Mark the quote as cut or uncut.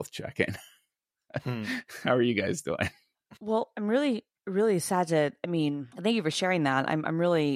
cut